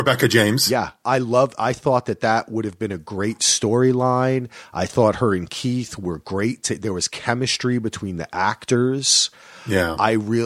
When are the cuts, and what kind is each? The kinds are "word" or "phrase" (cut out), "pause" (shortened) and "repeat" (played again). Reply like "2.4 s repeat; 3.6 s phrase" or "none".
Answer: none